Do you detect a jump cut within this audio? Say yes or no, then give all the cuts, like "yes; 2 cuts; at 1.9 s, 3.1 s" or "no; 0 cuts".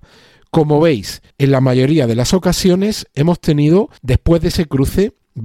yes; 2 cuts; at 1.3 s, 4.0 s